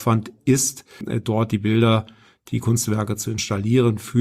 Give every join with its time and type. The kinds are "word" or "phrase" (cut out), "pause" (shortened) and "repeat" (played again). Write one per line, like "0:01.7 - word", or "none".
none